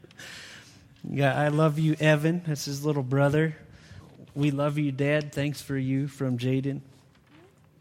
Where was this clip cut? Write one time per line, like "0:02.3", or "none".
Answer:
none

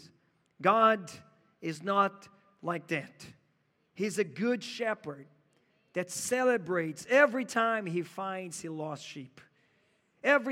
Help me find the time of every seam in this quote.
none

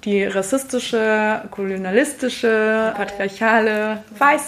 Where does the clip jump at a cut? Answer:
0:02.9

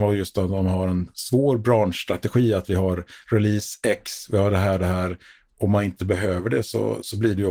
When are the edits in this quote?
none

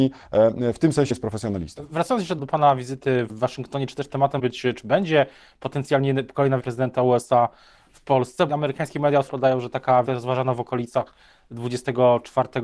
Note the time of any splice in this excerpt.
0:01.1
0:02.4
0:03.3
0:04.4
0:06.6
0:08.5
0:09.3
0:10.1

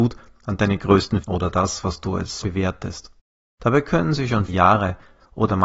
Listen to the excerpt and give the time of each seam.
0:01.2
0:02.4
0:04.5

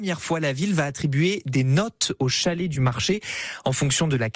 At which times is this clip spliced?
none

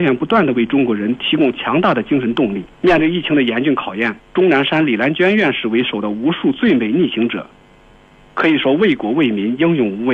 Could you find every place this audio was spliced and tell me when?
0:02.7
0:04.2

